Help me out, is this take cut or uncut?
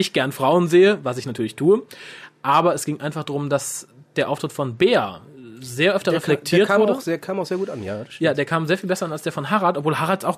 uncut